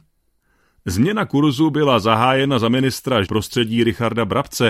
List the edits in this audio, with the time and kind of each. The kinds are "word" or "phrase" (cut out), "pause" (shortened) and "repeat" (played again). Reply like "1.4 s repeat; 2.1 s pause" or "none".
3.2 s word